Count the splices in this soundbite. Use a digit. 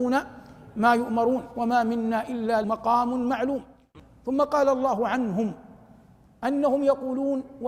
1